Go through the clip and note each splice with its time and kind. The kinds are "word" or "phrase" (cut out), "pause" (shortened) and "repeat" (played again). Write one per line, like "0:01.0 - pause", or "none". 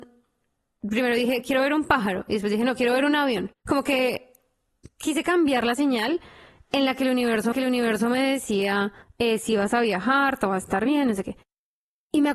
0:03.6 - pause
0:07.5 - repeat
0:09.0 - pause